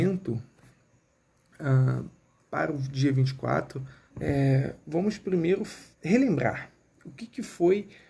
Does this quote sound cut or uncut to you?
cut